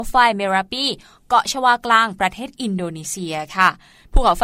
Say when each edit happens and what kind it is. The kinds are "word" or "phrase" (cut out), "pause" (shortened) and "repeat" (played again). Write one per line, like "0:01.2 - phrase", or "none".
none